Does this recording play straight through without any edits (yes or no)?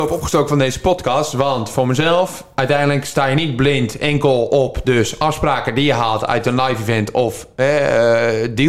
yes